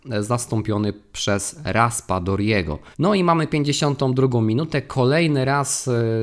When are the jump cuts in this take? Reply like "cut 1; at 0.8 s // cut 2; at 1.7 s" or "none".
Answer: cut 1; at 2.9 s